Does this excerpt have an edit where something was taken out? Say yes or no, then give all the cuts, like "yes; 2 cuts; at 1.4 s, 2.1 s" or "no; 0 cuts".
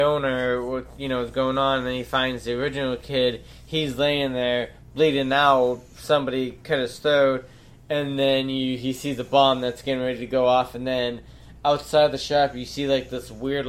no; 0 cuts